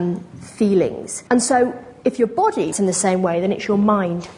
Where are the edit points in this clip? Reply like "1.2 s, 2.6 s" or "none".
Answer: 1.3 s, 2.7 s